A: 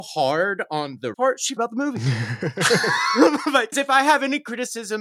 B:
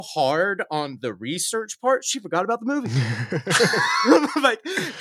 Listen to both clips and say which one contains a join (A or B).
A